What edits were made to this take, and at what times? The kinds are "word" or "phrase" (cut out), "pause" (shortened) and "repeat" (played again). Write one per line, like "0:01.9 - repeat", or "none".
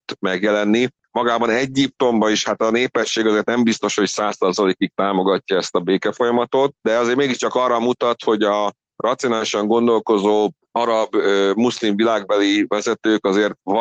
none